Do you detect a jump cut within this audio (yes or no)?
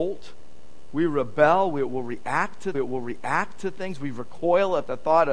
yes